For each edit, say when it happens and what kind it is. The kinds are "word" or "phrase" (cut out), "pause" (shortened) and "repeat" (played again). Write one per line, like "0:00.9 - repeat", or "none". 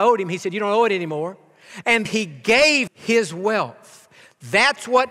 0:02.1 - word
0:02.9 - word